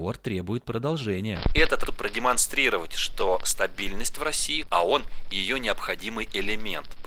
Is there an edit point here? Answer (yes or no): yes